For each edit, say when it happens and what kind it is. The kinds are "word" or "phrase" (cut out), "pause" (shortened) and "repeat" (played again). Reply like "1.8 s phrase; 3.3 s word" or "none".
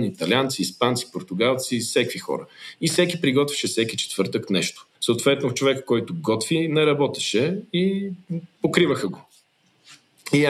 4.9 s pause